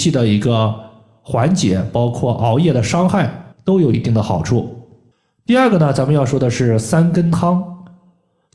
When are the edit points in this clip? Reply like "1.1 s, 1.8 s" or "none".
3.5 s